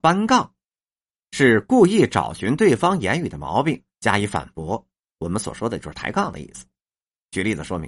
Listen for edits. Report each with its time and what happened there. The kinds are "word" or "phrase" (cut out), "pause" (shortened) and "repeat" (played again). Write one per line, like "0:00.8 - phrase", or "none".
none